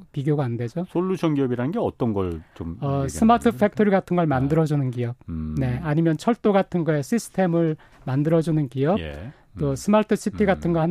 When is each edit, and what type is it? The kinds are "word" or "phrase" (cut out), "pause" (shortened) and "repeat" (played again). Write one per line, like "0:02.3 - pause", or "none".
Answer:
none